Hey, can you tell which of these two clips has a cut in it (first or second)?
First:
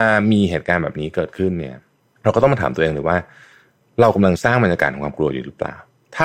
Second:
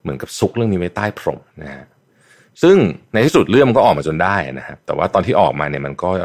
second